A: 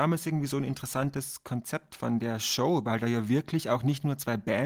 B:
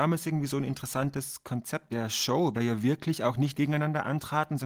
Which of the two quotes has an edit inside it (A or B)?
B